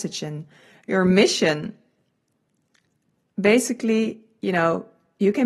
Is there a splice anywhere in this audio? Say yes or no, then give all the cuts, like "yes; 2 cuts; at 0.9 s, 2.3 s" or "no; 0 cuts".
no; 0 cuts